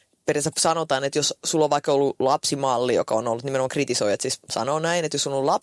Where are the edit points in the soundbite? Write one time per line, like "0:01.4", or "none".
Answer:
none